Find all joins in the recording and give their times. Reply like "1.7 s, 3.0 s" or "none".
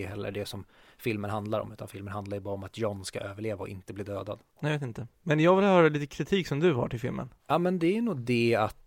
4.5 s, 5.1 s, 7.4 s